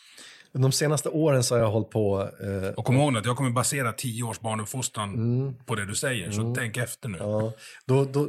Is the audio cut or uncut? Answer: uncut